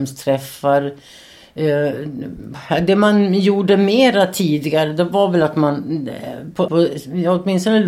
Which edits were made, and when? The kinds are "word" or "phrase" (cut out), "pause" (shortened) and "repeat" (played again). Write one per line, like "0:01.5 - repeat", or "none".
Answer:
0:06.7 - word

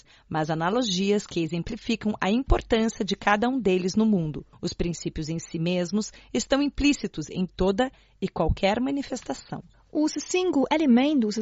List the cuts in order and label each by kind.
none

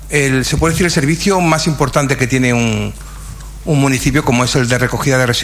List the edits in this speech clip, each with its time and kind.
none

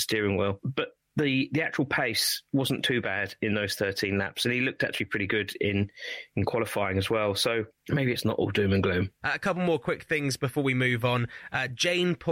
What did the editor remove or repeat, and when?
none

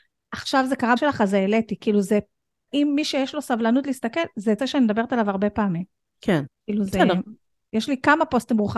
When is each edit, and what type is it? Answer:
0:01.0 - word
0:02.7 - word
0:04.6 - word

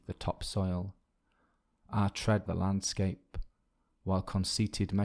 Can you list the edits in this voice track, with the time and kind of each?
0:02.5 - word

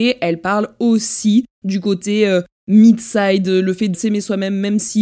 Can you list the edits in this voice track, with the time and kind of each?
0:03.9 - word

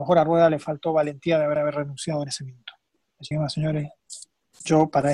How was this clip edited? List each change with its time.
0:01.6 - repeat
0:03.3 - word

